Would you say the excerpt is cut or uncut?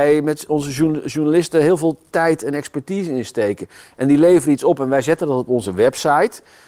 uncut